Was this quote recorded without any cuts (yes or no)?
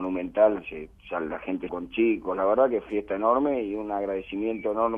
no